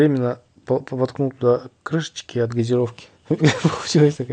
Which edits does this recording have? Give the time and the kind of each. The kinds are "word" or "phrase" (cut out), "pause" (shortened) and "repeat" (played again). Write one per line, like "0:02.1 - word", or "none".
0:03.2 - pause

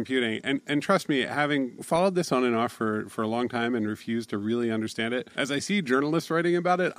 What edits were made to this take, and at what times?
none

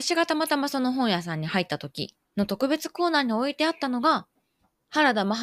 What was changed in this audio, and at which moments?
0:02.2 - pause

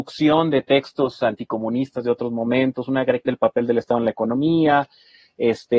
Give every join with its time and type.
0:03.3 - word

